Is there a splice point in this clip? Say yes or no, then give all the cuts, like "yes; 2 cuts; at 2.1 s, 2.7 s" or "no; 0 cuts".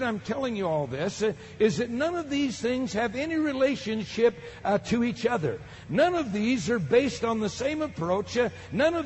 no; 0 cuts